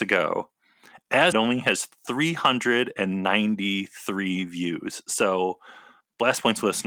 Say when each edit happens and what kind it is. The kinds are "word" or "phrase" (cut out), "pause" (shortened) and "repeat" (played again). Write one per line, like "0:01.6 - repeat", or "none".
0:01.3 - phrase